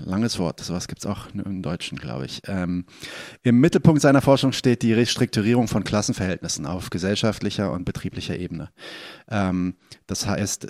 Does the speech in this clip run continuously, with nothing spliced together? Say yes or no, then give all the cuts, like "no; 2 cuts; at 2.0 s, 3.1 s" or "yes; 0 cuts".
yes; 0 cuts